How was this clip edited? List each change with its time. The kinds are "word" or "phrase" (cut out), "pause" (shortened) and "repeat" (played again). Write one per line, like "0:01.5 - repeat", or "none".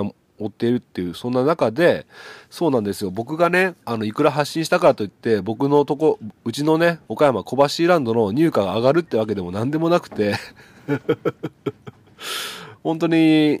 0:07.0 - pause